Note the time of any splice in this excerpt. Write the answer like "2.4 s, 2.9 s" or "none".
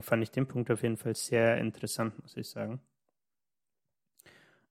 none